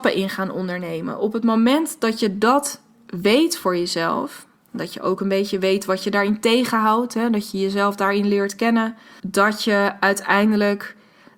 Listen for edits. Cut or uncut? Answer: cut